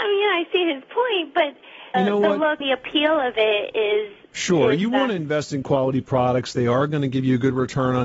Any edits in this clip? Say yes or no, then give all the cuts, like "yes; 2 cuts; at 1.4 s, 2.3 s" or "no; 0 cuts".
yes; 4 cuts; at 1.9 s, 2.6 s, 4.2 s, 5.6 s